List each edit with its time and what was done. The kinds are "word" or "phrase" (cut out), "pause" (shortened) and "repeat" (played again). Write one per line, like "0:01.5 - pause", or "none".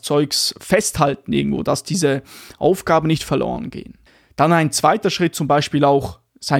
0:04.1 - pause